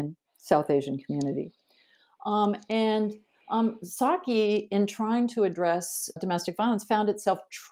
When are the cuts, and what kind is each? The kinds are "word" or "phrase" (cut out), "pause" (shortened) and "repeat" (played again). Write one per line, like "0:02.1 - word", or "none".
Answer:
0:06.2 - word